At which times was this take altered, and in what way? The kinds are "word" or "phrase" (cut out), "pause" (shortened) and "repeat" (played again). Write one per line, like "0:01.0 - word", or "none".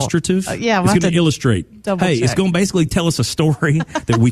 none